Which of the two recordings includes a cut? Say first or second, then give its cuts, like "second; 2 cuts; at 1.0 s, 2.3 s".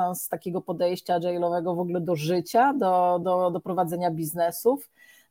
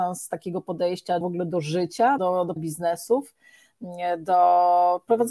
second; 3 cuts; at 1.2 s, 2.2 s, 2.6 s